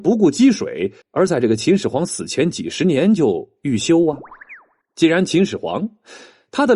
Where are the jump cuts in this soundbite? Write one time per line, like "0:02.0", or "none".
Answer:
0:01.0
0:04.8